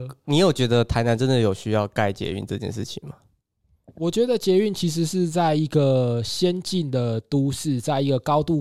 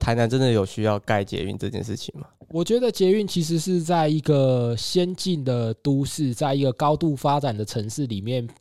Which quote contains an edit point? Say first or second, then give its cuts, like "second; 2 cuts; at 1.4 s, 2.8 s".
second; 1 cut; at 2.3 s